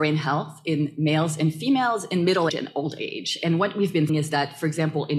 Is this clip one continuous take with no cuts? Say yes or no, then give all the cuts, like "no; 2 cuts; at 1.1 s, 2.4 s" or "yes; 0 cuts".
no; 2 cuts; at 2.5 s, 4.1 s